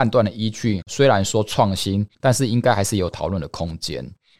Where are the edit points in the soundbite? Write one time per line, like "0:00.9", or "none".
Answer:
0:02.1